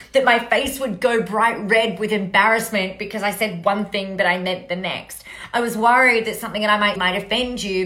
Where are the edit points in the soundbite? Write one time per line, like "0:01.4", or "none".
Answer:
0:07.0